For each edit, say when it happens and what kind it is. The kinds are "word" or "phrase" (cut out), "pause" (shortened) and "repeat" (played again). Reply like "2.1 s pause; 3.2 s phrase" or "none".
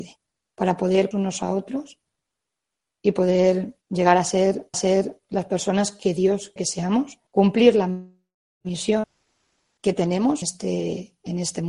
1.1 s word; 3.8 s pause; 4.7 s repeat; 6.6 s word; 7.3 s pause; 10.4 s word